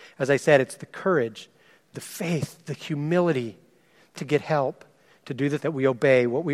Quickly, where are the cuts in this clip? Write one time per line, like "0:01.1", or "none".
0:01.9
0:04.1
0:05.6